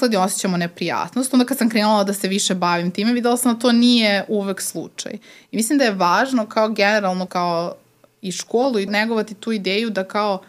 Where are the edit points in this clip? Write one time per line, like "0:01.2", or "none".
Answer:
0:07.3
0:08.9

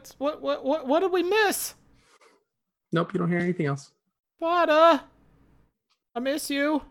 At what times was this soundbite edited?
none

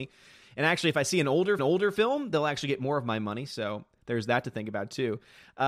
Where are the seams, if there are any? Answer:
0:01.6

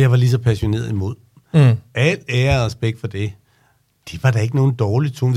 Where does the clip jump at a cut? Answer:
none

